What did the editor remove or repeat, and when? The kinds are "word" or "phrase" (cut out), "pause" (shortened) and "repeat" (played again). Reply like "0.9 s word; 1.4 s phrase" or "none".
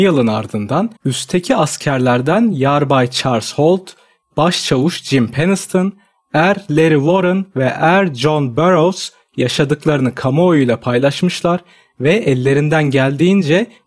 1.0 s pause